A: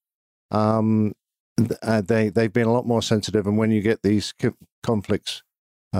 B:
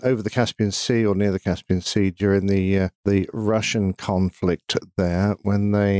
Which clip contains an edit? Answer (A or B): B